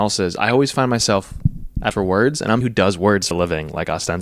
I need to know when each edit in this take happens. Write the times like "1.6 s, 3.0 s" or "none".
1.9 s, 2.6 s, 3.3 s